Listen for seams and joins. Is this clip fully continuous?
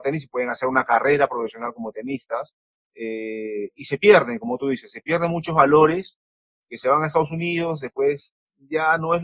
yes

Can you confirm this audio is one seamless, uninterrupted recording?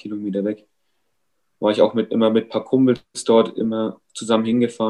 yes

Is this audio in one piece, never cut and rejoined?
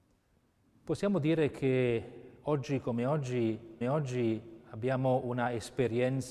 no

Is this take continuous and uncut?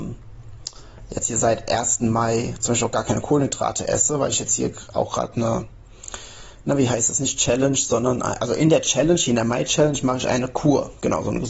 yes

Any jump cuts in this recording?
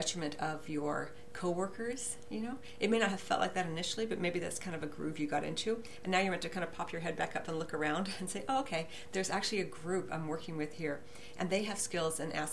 no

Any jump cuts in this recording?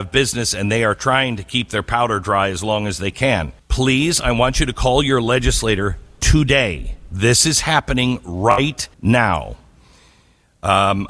yes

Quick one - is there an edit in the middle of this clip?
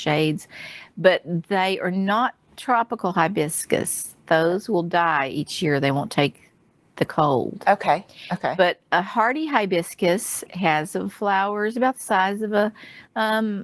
no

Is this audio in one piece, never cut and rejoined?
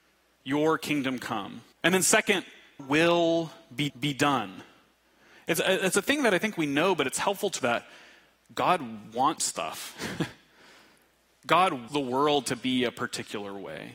no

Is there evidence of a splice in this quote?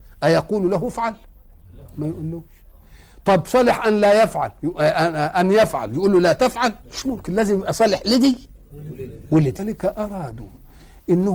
yes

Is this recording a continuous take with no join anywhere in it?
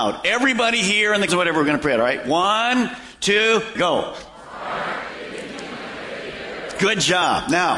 no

